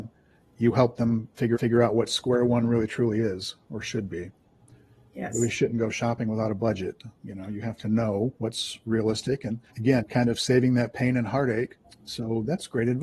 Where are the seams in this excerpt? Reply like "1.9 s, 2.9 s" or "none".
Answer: 1.5 s, 9.7 s, 11.8 s